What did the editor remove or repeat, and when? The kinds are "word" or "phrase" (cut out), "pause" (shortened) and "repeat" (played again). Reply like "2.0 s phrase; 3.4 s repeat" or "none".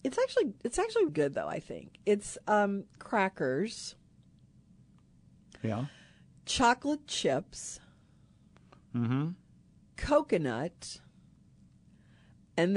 1.1 s word; 3.0 s word

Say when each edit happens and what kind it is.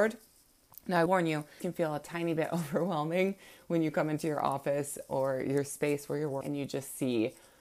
1.1 s word; 1.6 s word; 6.4 s word

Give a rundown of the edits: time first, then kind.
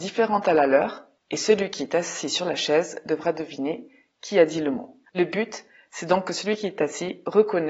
5.1 s pause

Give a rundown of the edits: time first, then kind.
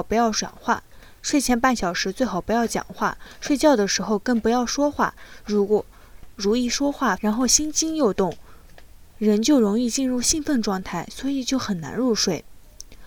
7.2 s phrase

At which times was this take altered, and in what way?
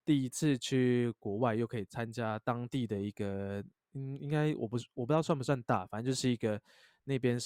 none

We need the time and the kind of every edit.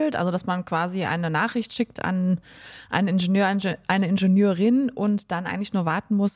none

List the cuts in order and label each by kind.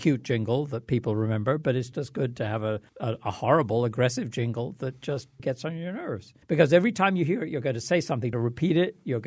1.9 s word; 2.9 s pause; 5.4 s word; 6.4 s pause; 8.3 s phrase

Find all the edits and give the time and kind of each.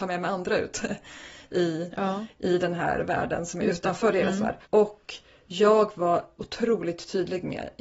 4.6 s pause

